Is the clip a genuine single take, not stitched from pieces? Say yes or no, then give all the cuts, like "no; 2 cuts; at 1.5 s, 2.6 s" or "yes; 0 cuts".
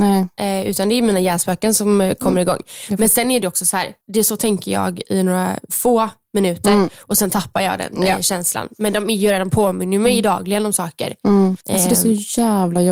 no; 2 cuts; at 4.0 s, 11.6 s